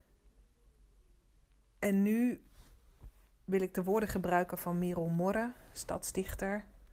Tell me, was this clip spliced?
no; 0 cuts

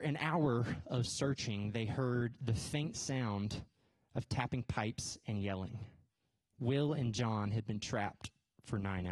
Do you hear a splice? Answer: no; 0 cuts

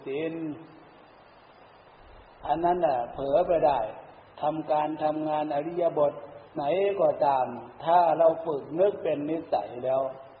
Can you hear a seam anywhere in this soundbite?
yes; 2 cuts; at 4.2 s, 6.5 s

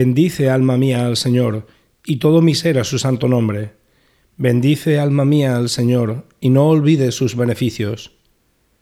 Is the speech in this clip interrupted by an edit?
no; 0 cuts

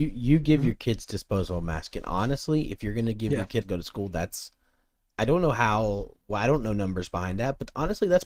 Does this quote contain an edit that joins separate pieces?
yes; 1 cut; at 3.6 s

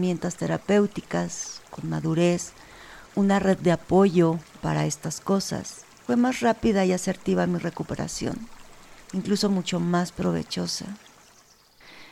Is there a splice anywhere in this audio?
yes; 4 cuts; at 3.1 s, 4.6 s, 6.1 s, 9.0 s

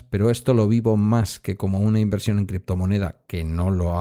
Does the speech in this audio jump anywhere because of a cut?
no; 0 cuts

